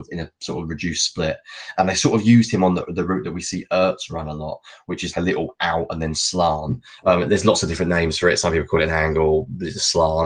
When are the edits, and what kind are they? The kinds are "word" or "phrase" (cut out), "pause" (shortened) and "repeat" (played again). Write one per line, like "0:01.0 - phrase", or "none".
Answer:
0:05.1 - word

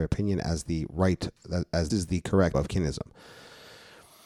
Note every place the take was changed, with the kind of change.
0:01.9 - word
0:02.5 - word

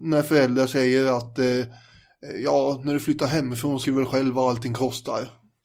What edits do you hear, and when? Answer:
0:03.8 - word

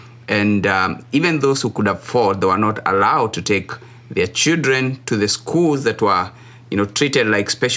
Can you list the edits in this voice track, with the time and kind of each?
none

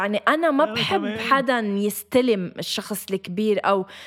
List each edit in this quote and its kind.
none

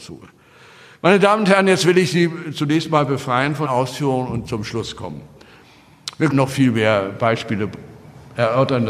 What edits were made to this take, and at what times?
0:03.6 - word
0:06.3 - word

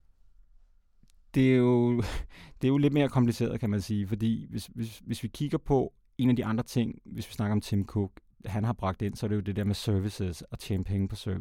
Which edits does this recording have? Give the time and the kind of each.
none

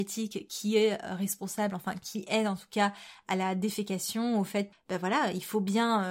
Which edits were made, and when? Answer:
0:04.7 - word

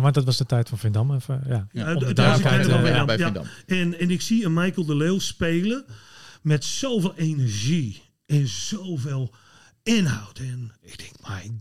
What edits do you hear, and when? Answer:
none

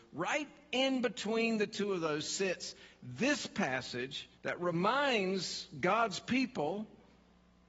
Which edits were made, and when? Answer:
0:04.3 - pause

